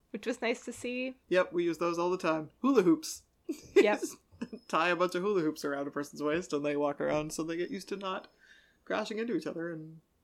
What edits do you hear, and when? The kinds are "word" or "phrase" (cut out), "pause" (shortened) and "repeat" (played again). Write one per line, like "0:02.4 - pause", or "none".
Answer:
0:01.2 - pause